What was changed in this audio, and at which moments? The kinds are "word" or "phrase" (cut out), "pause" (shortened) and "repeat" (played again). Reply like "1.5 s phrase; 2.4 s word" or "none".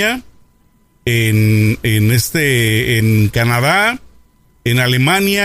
none